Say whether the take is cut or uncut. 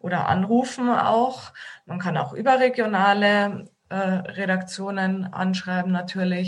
uncut